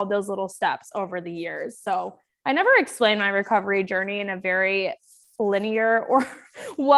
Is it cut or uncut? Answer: uncut